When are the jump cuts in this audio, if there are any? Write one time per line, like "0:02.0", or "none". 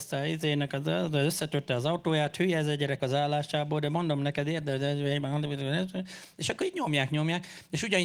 0:03.0

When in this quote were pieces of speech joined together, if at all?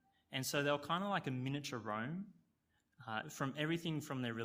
none

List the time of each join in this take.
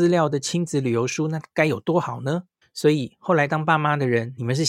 0:02.6

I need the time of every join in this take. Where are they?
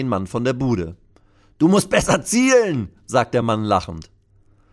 none

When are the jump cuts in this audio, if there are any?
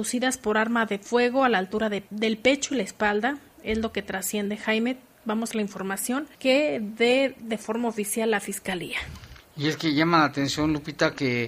0:02.1
0:05.5
0:06.3

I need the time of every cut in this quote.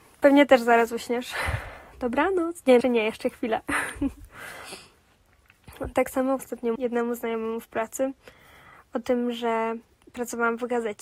0:02.8
0:06.4
0:06.8

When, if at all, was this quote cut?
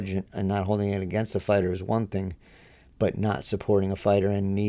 none

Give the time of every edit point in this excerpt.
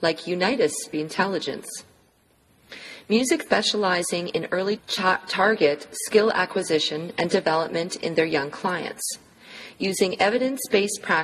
0:00.9
0:03.5
0:04.8

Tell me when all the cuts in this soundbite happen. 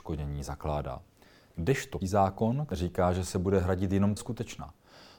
0:02.0
0:04.2

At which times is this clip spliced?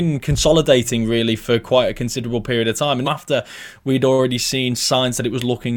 0:03.0

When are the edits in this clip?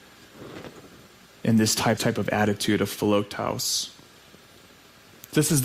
0:02.0

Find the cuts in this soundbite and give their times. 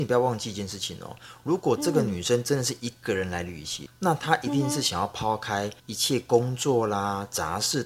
0:03.9
0:05.8

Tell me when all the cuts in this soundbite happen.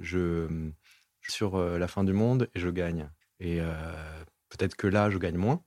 0:01.3
0:03.2

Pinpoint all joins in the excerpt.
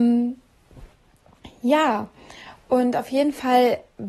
none

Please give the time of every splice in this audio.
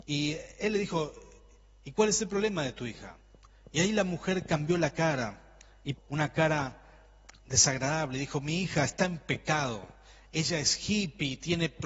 0:06.0

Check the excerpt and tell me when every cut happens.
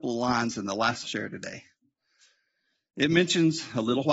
0:01.0

